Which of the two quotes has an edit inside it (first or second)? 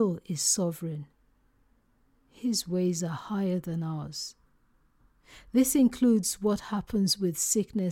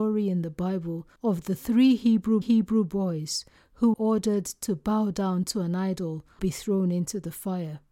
second